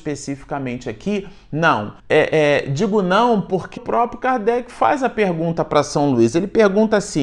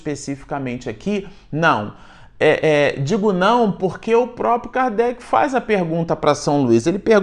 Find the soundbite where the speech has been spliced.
first; 2 cuts; at 2.0 s, 3.8 s

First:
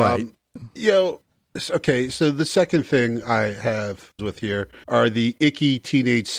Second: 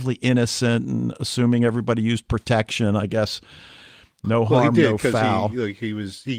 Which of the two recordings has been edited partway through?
first; 2 cuts; at 4.2 s, 4.8 s

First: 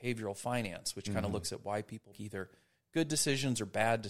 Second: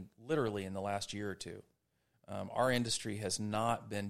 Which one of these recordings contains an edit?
first; 1 cut; at 2.1 s

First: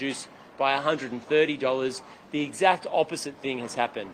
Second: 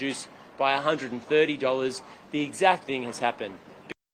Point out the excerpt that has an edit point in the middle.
second; 1 cut; at 2.8 s

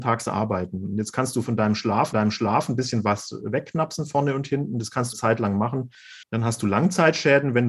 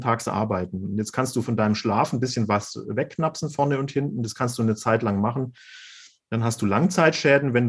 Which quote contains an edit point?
first; 3 cuts; at 2.1 s, 5.1 s, 6.2 s

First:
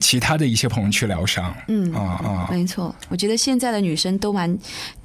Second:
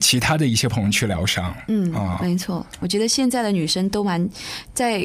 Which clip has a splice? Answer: first; 1 cut; at 2.2 s

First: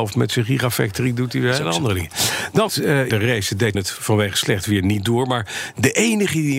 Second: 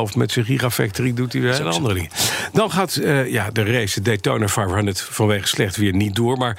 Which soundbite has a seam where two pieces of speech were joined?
first; 3 cuts; at 2.7 s, 3.1 s, 3.7 s

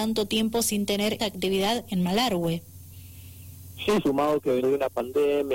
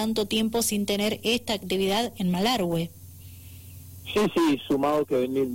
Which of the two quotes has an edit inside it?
first; 3 cuts; at 1.2 s, 4.0 s, 4.6 s

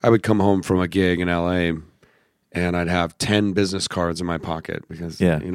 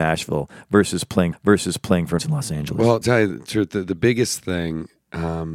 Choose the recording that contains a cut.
second; 3 cuts; at 1.3 s, 2.2 s, 3.0 s

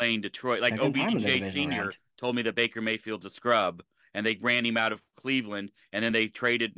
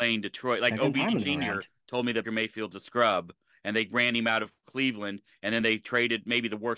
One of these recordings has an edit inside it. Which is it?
second; 2 cuts; at 1.2 s, 2.2 s

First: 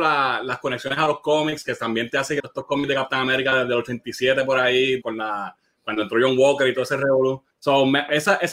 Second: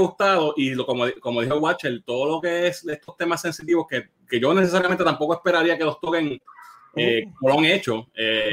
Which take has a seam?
first; 3 cuts; at 2.4 s, 5.0 s, 7.5 s

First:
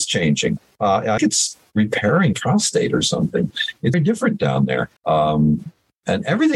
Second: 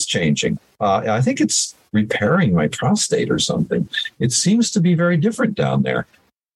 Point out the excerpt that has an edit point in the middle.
first; 4 cuts; at 1.2 s, 2.3 s, 3.9 s, 5.0 s

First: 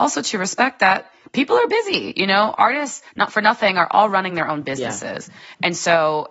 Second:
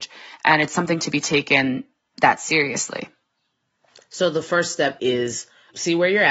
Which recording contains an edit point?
second; 1 cut; at 5.0 s

